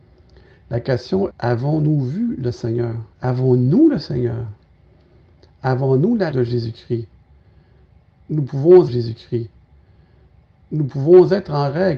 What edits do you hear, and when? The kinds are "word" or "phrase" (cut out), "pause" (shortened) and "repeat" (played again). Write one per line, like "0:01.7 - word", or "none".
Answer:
0:01.3 - word
0:03.1 - pause
0:06.3 - word
0:08.9 - repeat